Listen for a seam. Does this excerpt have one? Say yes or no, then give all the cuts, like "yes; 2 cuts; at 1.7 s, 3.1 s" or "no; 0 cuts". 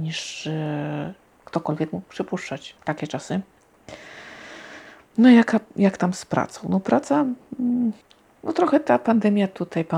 no; 0 cuts